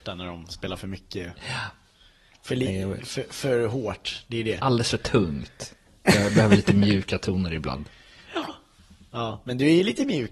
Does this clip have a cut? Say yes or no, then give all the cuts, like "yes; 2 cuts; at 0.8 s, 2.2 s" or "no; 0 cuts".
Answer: no; 0 cuts